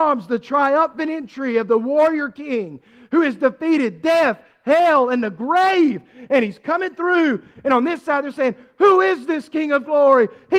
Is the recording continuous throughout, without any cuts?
yes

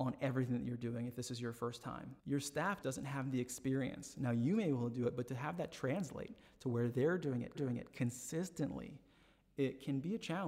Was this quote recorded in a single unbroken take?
no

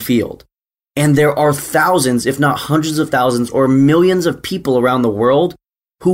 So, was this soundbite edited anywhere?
no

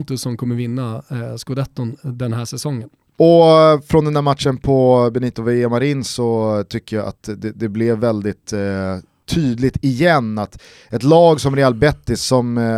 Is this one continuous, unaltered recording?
yes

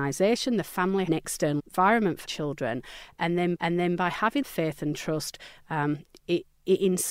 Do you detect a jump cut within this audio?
yes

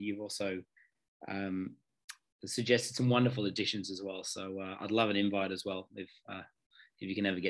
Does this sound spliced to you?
no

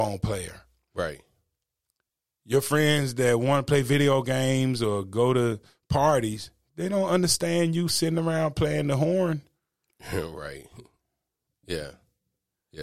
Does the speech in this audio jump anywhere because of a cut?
no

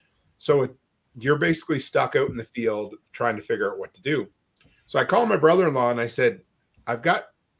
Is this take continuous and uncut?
yes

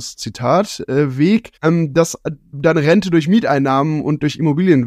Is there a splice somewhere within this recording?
yes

